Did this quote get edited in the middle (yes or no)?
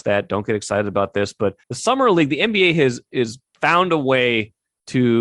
yes